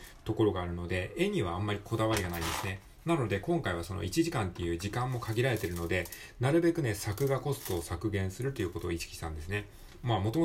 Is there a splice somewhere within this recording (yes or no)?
no